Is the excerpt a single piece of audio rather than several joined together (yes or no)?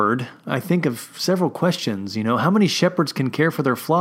yes